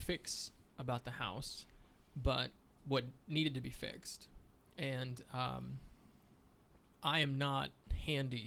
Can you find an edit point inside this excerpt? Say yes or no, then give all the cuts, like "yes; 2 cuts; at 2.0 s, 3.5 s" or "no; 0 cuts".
no; 0 cuts